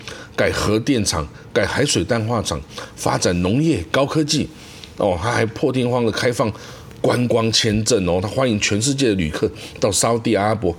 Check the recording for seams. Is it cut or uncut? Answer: uncut